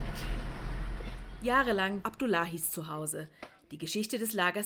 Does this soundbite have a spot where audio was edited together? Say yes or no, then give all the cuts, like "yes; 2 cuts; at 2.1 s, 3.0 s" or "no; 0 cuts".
yes; 1 cut; at 2.0 s